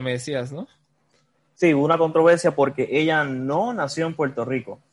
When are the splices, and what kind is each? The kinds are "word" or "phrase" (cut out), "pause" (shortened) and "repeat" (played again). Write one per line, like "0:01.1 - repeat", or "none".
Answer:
none